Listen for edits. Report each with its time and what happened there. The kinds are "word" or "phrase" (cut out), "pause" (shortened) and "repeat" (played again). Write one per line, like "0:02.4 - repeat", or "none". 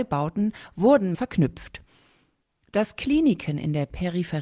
0:01.1 - word